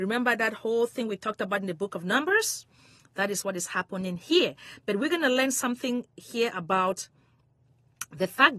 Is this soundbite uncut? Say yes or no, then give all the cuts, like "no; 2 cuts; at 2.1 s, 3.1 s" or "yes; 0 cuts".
yes; 0 cuts